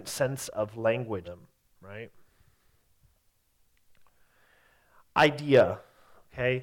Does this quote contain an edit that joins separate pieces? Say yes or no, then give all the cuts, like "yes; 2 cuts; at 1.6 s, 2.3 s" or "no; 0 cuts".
yes; 1 cut; at 1.2 s